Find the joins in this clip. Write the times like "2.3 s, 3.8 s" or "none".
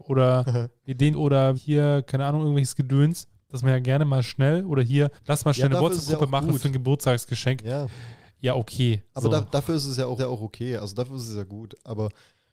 1.1 s, 1.5 s, 3.6 s, 5.2 s, 10.2 s